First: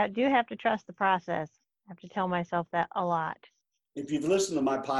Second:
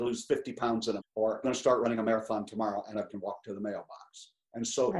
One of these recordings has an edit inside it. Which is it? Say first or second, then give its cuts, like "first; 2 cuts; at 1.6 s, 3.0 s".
second; 3 cuts; at 1.0 s, 1.4 s, 3.1 s